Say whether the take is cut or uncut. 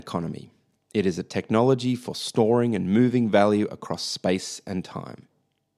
uncut